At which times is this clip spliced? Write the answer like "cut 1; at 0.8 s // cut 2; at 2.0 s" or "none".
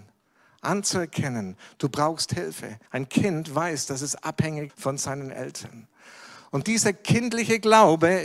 cut 1; at 2.9 s // cut 2; at 4.7 s // cut 3; at 6.6 s